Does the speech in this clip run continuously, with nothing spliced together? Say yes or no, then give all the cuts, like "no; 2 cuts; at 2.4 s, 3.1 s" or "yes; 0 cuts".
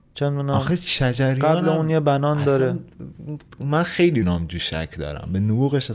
no; 1 cut; at 4.2 s